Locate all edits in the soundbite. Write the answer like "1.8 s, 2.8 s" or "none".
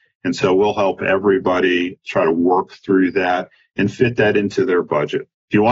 none